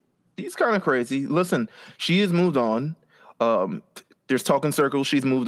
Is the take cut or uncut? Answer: uncut